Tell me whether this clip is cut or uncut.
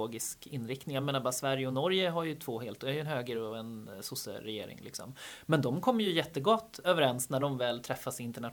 uncut